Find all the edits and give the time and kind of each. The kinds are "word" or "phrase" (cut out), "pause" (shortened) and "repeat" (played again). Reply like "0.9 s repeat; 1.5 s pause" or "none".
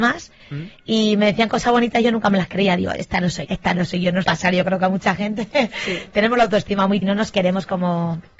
3.4 s word; 4.2 s word; 7.0 s word

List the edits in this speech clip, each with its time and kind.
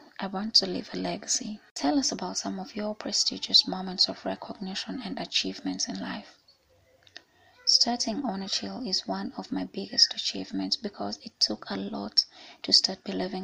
none

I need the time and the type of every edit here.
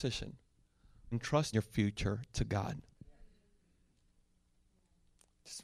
1.1 s word; 1.5 s phrase

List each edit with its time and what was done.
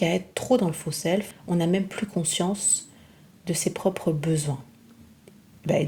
none

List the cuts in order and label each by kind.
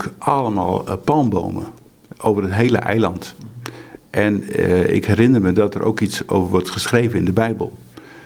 none

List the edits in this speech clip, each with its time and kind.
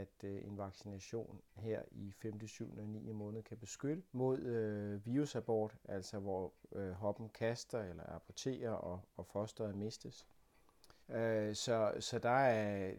4.1 s pause; 11.0 s pause

